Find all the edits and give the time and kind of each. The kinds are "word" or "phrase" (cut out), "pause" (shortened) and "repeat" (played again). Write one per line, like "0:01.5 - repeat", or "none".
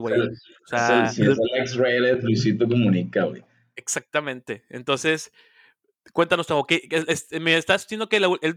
none